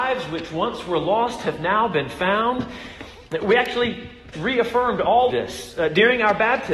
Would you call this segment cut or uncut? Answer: cut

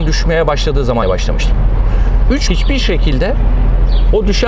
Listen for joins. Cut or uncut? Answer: cut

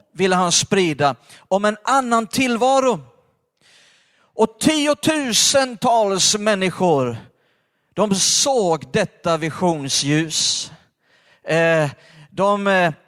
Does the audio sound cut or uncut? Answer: uncut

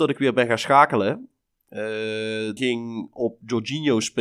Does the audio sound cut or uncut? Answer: cut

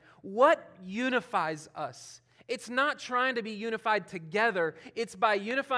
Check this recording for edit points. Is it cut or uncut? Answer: uncut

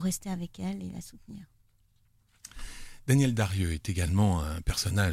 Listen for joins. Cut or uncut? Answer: uncut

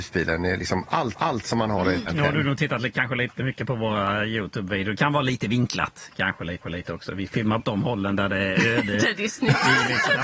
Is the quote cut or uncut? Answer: cut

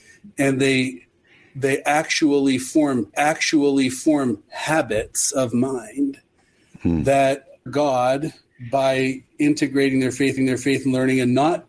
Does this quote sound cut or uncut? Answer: cut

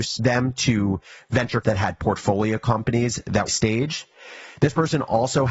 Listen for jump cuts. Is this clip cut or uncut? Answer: cut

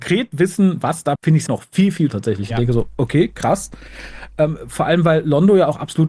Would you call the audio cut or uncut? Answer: cut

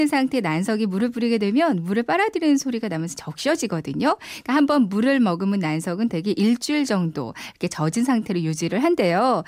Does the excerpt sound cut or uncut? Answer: uncut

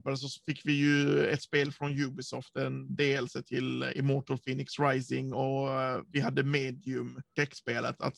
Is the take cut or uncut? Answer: uncut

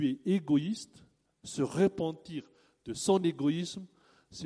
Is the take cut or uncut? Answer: uncut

